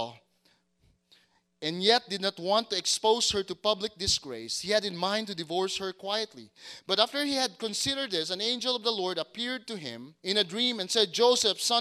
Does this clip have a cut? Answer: yes; 1 cut; at 10.2 s

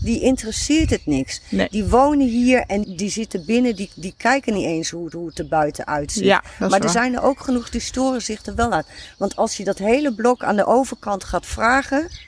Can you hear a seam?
yes; 2 cuts; at 2.8 s, 5.1 s

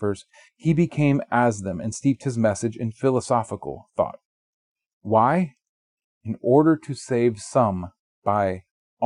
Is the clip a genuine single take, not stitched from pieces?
yes; 0 cuts

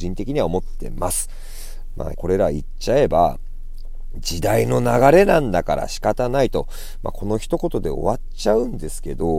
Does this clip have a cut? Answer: yes; 1 cut; at 2.1 s

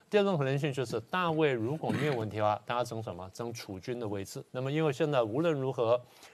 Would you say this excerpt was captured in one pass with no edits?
no; 1 cut; at 4.5 s

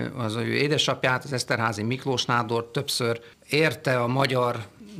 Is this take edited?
no; 0 cuts

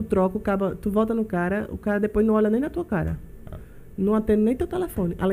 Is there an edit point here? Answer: no; 0 cuts

